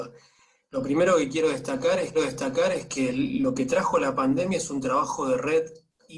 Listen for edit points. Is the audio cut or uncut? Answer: cut